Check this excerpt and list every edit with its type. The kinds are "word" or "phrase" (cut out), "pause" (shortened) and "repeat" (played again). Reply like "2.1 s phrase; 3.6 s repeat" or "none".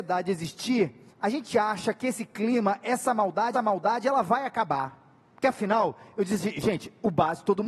1.1 s pause; 3.5 s repeat